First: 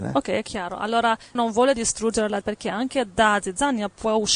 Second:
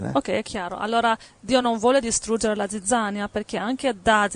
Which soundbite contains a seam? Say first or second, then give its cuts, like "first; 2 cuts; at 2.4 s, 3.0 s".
first; 2 cuts; at 1.3 s, 2.4 s